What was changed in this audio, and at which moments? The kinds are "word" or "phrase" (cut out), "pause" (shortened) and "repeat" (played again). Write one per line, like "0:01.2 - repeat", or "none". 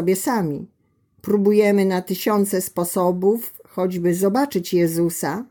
none